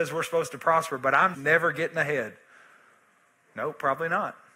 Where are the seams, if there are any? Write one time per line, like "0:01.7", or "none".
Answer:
0:01.3

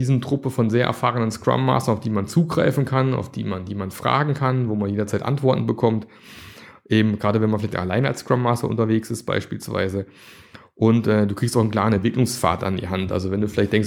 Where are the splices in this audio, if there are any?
none

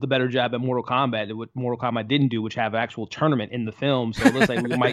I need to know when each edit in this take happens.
none

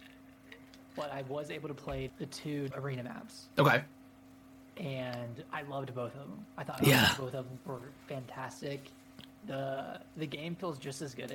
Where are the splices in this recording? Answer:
0:02.1
0:02.7
0:07.6

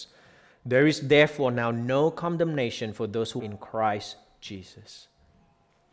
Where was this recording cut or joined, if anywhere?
0:03.4

